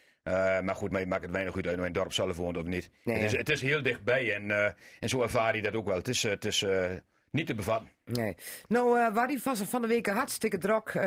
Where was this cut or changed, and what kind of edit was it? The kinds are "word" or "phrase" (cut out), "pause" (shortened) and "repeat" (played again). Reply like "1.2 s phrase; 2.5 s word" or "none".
0.9 s phrase